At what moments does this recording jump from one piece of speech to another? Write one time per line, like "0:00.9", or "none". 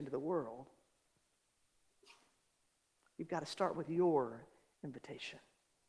none